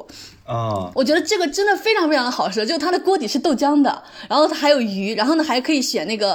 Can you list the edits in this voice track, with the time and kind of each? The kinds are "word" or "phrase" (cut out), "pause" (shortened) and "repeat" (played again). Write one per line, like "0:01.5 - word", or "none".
0:00.9 - word